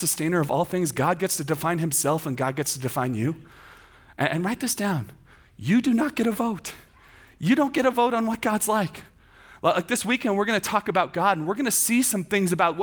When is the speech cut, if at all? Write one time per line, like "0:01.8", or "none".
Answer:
none